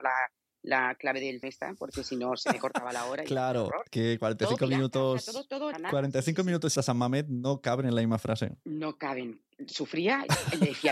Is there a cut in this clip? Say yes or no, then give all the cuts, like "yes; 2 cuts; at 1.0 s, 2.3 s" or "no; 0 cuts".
yes; 4 cuts; at 1.4 s, 3.9 s, 5.7 s, 6.8 s